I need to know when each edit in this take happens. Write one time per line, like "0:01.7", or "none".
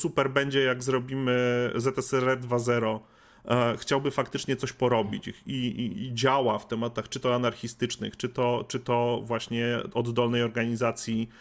none